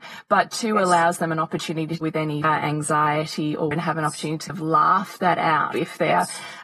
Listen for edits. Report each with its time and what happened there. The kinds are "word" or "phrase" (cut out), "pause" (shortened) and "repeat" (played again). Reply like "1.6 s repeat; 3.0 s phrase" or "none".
2.0 s word; 2.4 s word; 3.7 s word; 4.5 s word; 5.7 s word